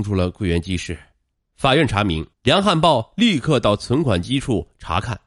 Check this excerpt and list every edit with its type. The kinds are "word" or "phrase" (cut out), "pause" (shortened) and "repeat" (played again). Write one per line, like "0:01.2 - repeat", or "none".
0:01.3 - pause
0:02.3 - pause